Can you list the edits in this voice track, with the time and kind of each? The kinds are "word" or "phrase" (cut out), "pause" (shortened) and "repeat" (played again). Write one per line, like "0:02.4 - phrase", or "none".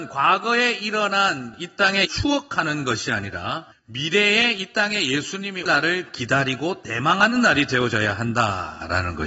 0:02.0 - phrase
0:03.7 - pause
0:05.7 - word